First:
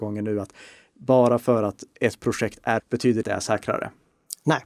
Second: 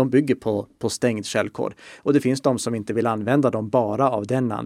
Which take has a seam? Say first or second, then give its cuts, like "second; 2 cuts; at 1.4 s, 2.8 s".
first; 2 cuts; at 2.8 s, 3.2 s